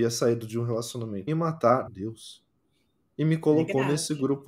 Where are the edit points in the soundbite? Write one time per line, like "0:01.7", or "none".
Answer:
0:01.3
0:01.9